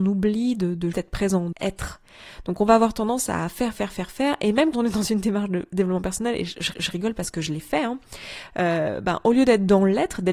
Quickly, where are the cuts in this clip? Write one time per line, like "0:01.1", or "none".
0:00.9
0:01.5
0:03.7
0:04.7
0:06.7